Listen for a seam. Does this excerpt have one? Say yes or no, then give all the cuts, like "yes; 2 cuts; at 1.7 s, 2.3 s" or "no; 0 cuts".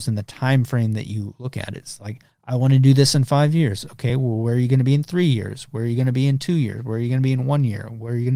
no; 0 cuts